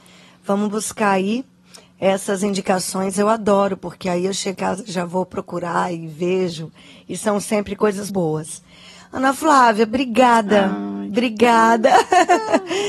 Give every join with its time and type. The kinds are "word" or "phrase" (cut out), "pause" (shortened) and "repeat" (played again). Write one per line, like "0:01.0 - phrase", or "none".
0:04.5 - word
0:08.1 - word